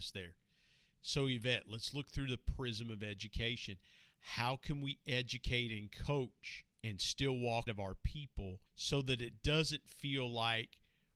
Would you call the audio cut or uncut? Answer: cut